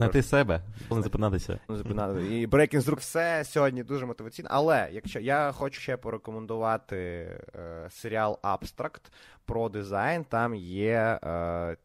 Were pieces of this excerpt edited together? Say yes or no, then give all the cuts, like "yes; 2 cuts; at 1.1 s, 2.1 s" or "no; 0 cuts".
yes; 4 cuts; at 0.9 s, 1.7 s, 3.0 s, 5.8 s